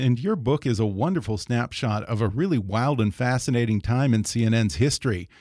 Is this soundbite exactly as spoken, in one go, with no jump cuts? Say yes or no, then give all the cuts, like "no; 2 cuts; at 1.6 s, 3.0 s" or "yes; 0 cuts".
yes; 0 cuts